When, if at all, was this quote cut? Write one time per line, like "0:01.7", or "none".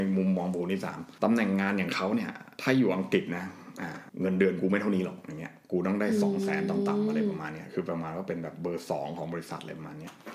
0:01.2